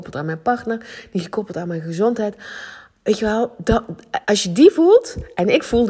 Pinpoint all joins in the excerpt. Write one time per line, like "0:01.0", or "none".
0:04.2

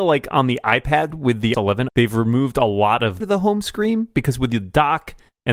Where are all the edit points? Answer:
0:01.1
0:01.5
0:01.9
0:03.2

